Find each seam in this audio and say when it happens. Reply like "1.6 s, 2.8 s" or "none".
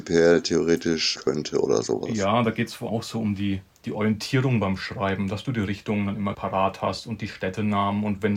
1.2 s, 2.9 s, 6.3 s

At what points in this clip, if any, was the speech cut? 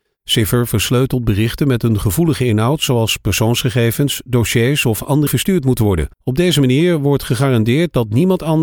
5.3 s, 6.1 s

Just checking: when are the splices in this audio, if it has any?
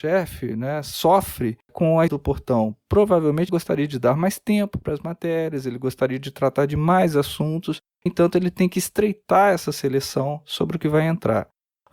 1.6 s, 2.1 s, 3.5 s, 8.1 s

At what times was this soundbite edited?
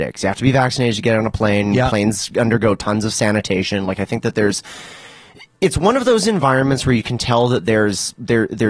none

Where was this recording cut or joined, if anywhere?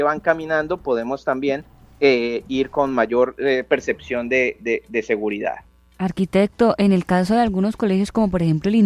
none

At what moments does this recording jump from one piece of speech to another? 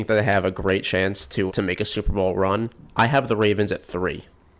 1.5 s

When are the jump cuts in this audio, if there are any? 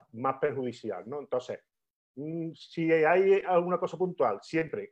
none

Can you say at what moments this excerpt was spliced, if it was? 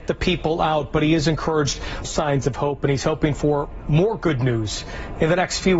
2.0 s

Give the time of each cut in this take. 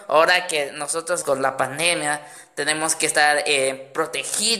1.2 s

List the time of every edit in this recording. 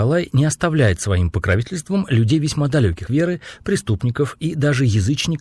3.1 s

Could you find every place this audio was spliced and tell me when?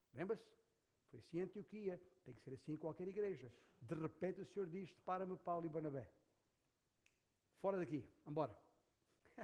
none

